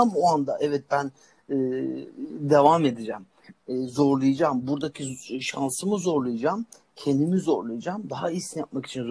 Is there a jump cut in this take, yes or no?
no